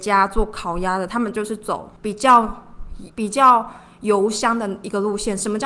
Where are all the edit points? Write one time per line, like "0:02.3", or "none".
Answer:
0:02.0
0:03.1